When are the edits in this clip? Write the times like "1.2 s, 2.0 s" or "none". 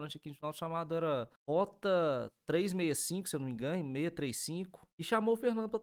1.4 s, 4.9 s